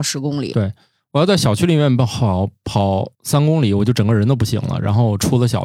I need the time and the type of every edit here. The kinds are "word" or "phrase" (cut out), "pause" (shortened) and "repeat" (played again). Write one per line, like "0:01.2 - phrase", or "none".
0:03.1 - pause